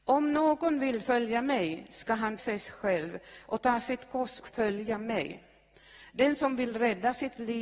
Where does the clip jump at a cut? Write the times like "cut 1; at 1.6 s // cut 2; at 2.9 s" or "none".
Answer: cut 1; at 2.4 s // cut 2; at 4.4 s